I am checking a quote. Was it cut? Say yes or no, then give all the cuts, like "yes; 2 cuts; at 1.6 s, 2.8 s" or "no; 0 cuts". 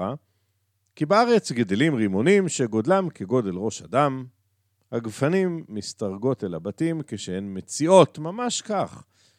no; 0 cuts